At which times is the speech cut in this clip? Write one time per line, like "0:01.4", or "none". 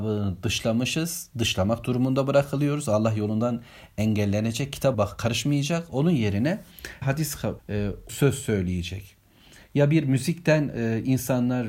0:04.9
0:07.0
0:07.6
0:08.1